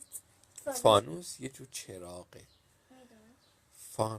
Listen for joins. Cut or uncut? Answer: uncut